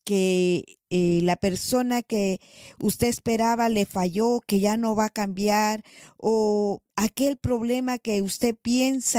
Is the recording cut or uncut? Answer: cut